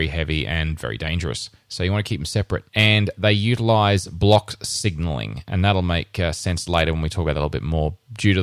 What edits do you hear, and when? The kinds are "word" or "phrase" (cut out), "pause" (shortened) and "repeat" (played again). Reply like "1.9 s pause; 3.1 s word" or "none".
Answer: 2.7 s pause